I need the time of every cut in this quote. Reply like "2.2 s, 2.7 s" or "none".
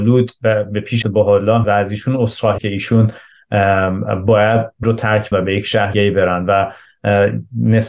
1.0 s, 1.6 s, 2.6 s, 4.8 s, 5.3 s, 5.9 s

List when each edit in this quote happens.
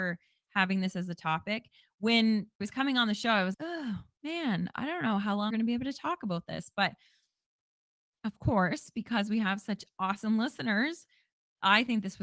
2.6 s, 3.5 s, 5.5 s

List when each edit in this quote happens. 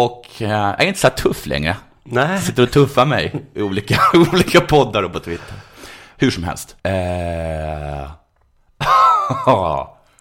6.8 s

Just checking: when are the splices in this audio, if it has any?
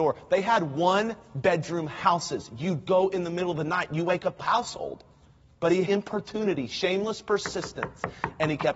2.9 s, 4.4 s, 5.4 s, 5.9 s

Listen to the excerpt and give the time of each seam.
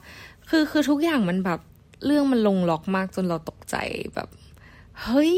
1.7 s

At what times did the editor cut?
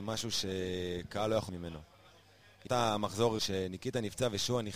1.5 s, 2.7 s, 3.4 s

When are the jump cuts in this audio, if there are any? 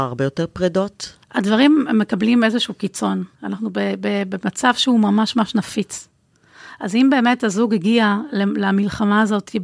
1.2 s, 3.3 s

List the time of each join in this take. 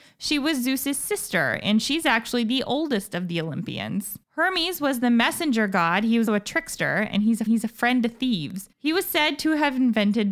4.2 s, 6.3 s, 7.5 s, 8.7 s

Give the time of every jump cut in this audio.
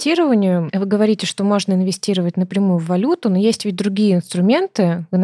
none

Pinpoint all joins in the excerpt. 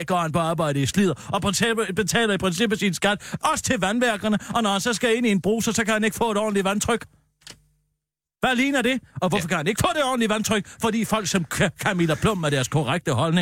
none

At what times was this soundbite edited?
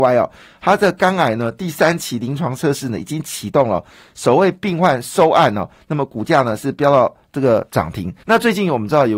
8.2 s

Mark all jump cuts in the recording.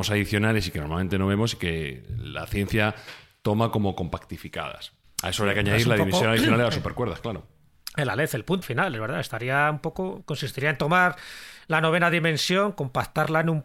5.0 s, 8.6 s

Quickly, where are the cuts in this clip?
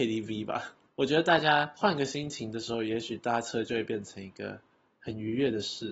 none

